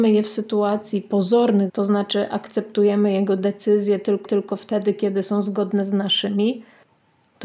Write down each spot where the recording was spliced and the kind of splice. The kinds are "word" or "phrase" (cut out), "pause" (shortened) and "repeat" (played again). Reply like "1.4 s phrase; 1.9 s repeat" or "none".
1.7 s word; 4.2 s repeat